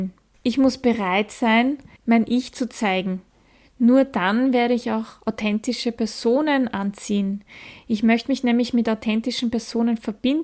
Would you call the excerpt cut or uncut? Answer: uncut